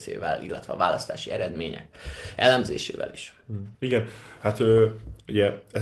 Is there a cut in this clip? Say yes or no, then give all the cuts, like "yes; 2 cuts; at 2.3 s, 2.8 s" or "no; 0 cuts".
yes; 1 cut; at 3.7 s